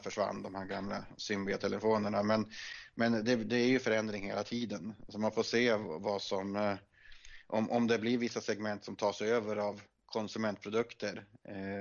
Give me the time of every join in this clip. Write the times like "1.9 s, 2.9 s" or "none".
none